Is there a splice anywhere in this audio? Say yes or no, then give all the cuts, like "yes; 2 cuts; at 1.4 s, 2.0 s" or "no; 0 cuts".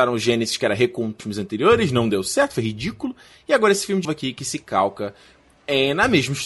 yes; 2 cuts; at 1.2 s, 4.0 s